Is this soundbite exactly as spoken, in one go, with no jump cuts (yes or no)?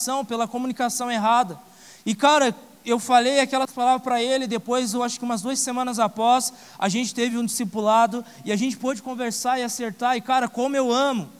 yes